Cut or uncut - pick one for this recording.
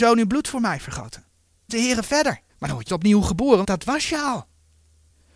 cut